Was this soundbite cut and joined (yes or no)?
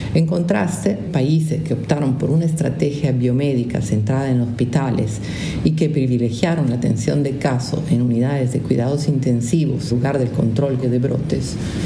yes